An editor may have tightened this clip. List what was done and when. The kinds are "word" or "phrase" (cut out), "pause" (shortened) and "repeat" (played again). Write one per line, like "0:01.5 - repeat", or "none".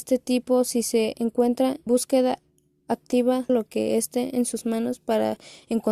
0:01.9 - word
0:03.5 - phrase

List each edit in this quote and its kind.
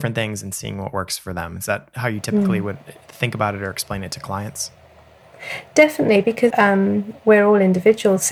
0:06.5 - word

